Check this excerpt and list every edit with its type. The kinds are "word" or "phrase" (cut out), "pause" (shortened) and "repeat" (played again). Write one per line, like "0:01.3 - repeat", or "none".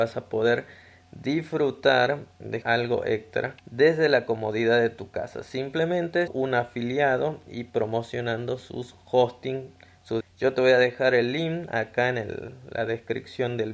0:02.6 - word
0:03.6 - pause
0:06.3 - word
0:10.2 - phrase